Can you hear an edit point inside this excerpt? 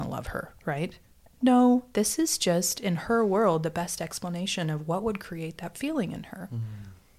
no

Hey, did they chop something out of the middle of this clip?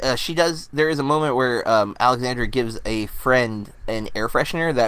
no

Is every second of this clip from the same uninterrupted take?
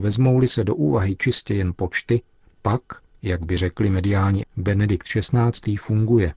no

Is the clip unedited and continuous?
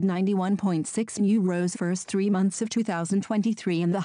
no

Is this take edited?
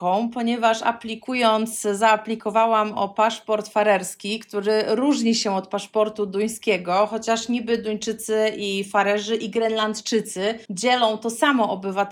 yes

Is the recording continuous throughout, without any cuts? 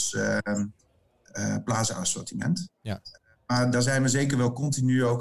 yes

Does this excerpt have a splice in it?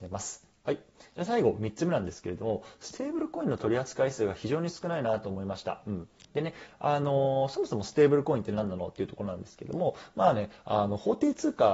yes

